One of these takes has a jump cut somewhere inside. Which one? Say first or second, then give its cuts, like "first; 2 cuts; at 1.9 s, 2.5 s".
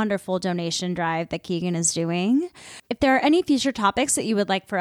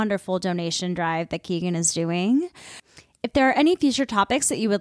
first; 1 cut; at 2.8 s